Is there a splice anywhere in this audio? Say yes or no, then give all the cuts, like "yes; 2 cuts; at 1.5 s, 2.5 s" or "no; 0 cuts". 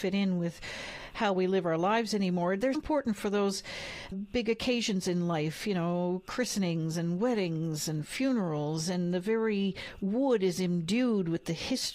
yes; 2 cuts; at 2.7 s, 4.1 s